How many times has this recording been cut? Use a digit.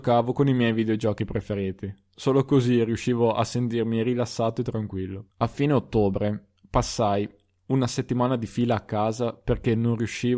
2